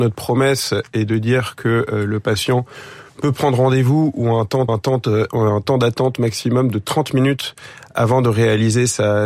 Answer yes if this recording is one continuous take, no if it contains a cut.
no